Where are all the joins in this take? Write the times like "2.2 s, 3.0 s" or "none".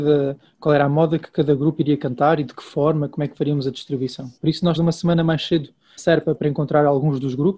4.4 s, 4.8 s, 6.0 s, 6.4 s